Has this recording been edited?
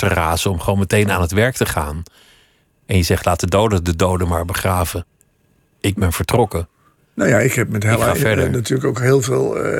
no; 0 cuts

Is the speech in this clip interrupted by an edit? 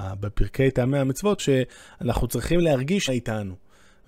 yes; 2 cuts; at 1.4 s, 3.1 s

